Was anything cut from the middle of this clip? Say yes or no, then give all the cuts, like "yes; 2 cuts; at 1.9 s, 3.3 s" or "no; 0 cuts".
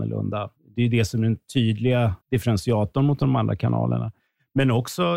yes; 1 cut; at 2.2 s